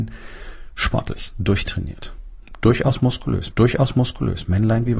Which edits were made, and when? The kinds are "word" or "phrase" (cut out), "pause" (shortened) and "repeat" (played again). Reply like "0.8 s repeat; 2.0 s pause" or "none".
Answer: 3.5 s repeat